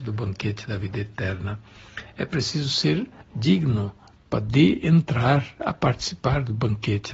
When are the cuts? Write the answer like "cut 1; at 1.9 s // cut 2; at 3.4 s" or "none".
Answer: none